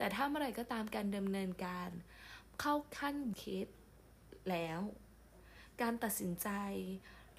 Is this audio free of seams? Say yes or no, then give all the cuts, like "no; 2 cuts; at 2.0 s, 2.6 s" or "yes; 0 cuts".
no; 1 cut; at 3.3 s